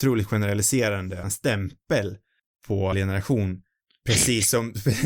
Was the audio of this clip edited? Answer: yes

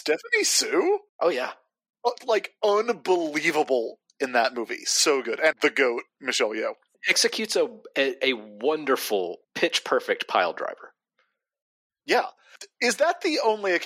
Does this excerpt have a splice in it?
yes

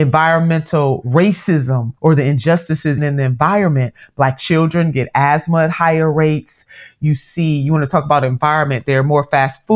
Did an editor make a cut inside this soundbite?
yes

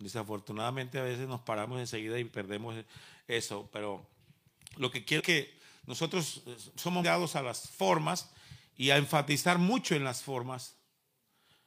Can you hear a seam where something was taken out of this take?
yes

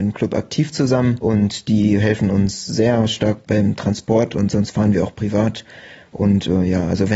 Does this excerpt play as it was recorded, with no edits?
yes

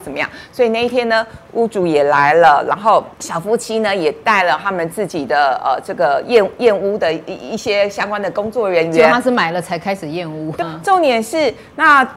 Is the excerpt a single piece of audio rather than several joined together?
no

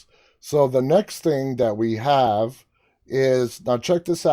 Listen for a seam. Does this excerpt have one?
no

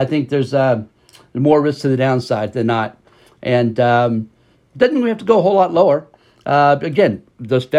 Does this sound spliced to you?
no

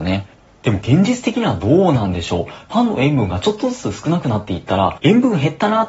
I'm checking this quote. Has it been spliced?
no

